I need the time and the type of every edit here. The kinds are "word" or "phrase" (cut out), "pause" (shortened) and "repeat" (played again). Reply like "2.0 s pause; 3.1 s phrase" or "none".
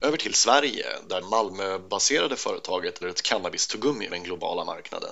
1.2 s word; 3.0 s phrase; 4.1 s word